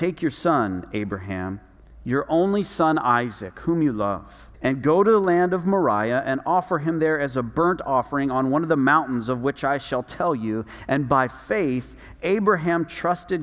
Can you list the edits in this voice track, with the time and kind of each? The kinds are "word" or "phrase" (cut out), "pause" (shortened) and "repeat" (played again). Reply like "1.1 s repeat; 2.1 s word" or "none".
1.8 s pause; 4.5 s pause